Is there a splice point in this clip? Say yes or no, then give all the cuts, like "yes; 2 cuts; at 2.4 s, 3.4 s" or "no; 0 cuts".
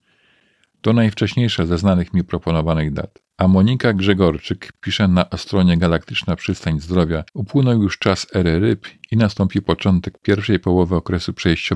yes; 2 cuts; at 3.3 s, 7.3 s